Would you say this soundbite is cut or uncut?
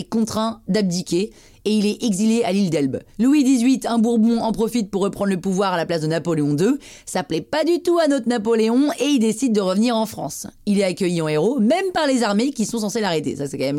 uncut